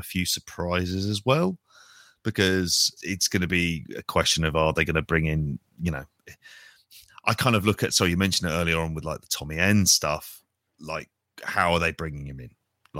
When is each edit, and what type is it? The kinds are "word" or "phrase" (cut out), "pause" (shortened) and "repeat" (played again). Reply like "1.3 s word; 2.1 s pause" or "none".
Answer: 3.0 s word